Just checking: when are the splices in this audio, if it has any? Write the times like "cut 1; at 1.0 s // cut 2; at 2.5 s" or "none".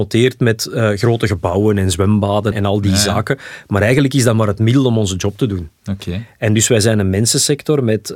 cut 1; at 2.5 s

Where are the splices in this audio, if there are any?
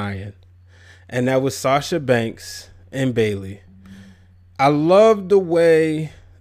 none

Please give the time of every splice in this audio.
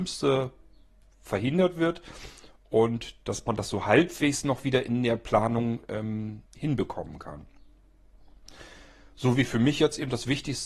cut 1; at 6.5 s

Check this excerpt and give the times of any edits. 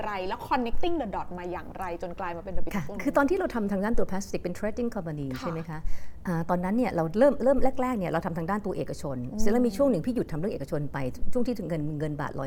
cut 1; at 2.7 s

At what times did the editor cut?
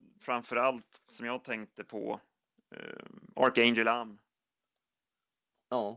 none

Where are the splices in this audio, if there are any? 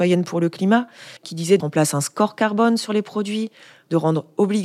cut 1; at 1.2 s // cut 2; at 1.6 s

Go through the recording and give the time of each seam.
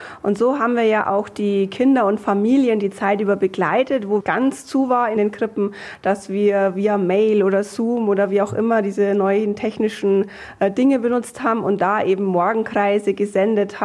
cut 1; at 4.2 s // cut 2; at 5.2 s

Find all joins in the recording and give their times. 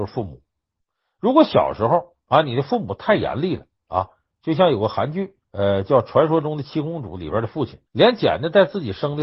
cut 1; at 2.2 s // cut 2; at 3.7 s // cut 3; at 5.4 s // cut 4; at 7.9 s

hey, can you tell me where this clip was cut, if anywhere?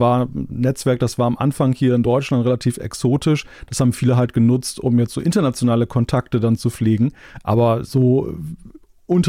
none

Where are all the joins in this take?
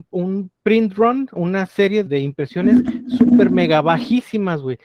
cut 1; at 1.4 s // cut 2; at 2.1 s

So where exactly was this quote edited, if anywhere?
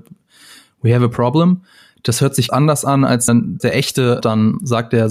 cut 1; at 2.5 s // cut 2; at 3.3 s // cut 3; at 3.6 s // cut 4; at 4.2 s

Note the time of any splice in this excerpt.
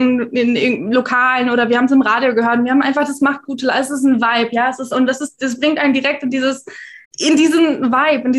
cut 1; at 7.0 s

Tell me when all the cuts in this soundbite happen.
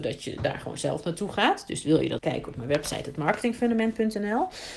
cut 1; at 2.2 s

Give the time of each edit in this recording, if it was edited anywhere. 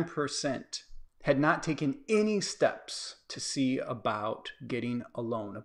none

